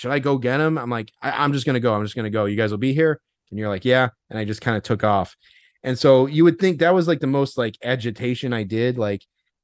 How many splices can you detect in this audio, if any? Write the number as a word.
zero